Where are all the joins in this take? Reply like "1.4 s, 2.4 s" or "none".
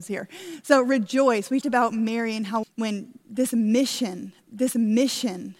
1.6 s, 2.6 s, 4.4 s